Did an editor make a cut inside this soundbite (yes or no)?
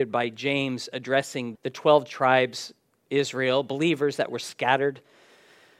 yes